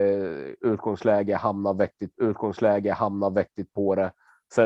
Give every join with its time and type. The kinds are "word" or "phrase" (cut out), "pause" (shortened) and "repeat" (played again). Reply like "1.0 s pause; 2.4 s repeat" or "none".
2.1 s repeat